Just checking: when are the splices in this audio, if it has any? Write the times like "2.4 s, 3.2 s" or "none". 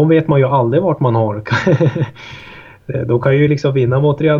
none